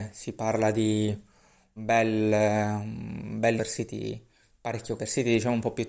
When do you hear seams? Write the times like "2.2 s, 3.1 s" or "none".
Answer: 1.8 s, 3.6 s, 5.0 s